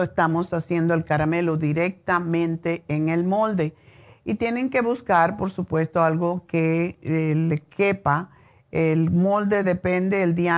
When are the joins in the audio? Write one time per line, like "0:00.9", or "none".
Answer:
none